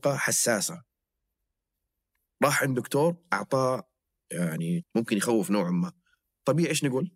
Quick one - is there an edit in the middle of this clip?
yes; 1 cut; at 4.8 s

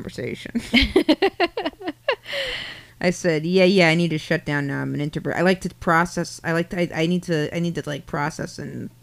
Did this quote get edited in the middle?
yes; 1 cut; at 2.9 s

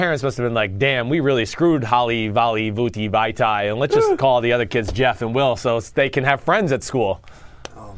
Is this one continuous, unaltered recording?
yes; 0 cuts

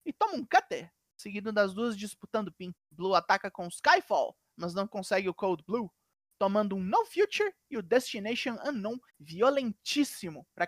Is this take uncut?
no; 2 cuts; at 2.7 s, 9.1 s

